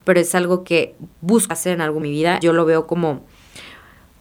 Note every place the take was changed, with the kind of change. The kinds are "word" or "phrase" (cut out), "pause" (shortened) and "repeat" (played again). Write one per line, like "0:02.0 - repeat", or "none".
0:01.5 - word
0:02.0 - phrase
0:02.4 - word